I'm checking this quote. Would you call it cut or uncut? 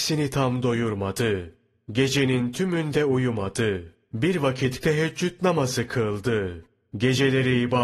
cut